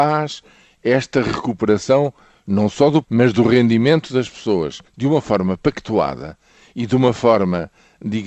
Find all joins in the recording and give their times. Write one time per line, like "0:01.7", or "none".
0:03.0
0:04.9